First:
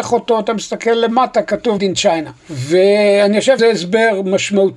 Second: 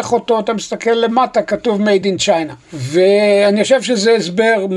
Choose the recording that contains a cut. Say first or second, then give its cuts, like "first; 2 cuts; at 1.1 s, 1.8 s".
first; 2 cuts; at 1.8 s, 3.6 s